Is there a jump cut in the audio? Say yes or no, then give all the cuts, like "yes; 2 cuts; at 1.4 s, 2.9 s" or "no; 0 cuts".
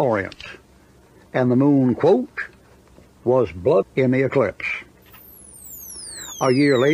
yes; 1 cut; at 3.8 s